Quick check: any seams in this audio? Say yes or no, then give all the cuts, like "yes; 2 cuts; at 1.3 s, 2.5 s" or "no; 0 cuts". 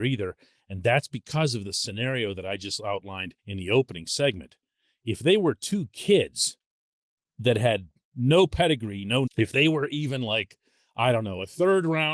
yes; 2 cuts; at 3.4 s, 9.3 s